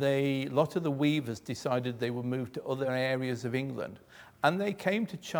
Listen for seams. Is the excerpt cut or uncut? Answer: uncut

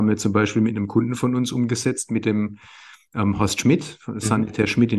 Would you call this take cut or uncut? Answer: uncut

